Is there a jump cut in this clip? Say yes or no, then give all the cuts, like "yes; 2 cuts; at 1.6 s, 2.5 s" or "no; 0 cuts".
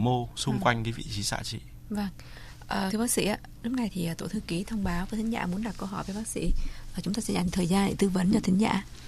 yes; 1 cut; at 2.9 s